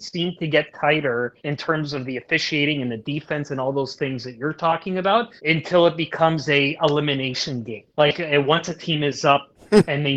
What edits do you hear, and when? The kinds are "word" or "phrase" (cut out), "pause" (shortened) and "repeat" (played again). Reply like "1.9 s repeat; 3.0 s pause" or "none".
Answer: 1.4 s pause; 5.4 s pause; 7.9 s pause